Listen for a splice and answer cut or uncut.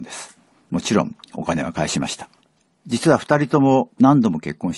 cut